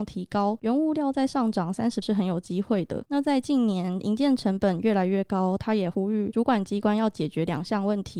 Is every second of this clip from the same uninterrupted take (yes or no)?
no